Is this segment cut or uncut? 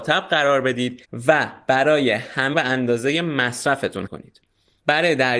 cut